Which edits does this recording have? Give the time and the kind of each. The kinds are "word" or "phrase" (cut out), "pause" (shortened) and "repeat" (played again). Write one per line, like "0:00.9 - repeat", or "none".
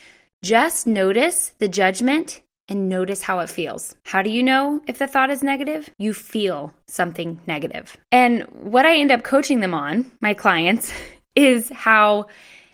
0:04.0 - pause
0:05.9 - pause
0:08.0 - pause
0:10.2 - pause